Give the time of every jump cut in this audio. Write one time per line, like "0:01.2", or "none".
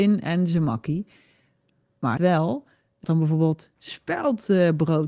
0:02.2
0:03.0